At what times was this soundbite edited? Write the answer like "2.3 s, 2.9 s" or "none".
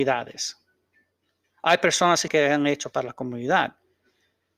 2.3 s, 2.9 s